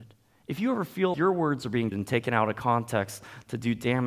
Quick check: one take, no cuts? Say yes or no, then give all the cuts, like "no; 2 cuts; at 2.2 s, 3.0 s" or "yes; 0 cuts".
no; 2 cuts; at 1.1 s, 1.9 s